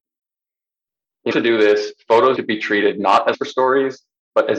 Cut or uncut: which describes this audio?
cut